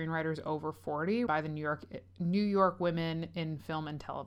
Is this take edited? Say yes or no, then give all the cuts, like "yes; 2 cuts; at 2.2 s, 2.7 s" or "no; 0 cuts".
yes; 1 cut; at 1.3 s